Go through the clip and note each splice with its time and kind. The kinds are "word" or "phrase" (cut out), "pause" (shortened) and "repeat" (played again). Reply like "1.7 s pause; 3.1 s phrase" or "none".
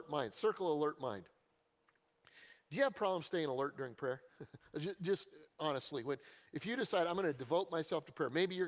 4.3 s pause